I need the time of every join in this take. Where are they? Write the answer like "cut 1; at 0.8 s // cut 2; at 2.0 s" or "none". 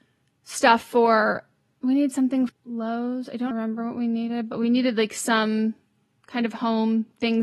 cut 1; at 2.5 s // cut 2; at 3.5 s